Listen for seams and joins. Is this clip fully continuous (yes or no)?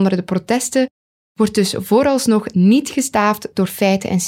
yes